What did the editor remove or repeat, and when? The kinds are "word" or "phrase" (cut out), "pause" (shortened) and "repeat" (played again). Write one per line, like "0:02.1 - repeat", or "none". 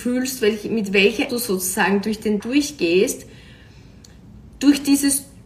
0:01.3 - word
0:02.4 - word